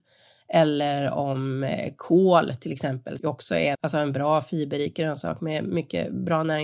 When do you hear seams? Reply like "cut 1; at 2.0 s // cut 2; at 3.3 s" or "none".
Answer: cut 1; at 3.2 s // cut 2; at 3.7 s